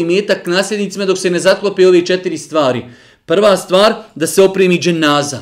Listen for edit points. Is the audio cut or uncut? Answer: uncut